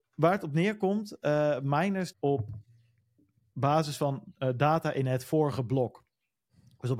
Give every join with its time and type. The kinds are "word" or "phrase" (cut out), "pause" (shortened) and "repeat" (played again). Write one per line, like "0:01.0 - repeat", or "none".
0:02.1 - phrase